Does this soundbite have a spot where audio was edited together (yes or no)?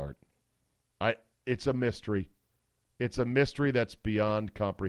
no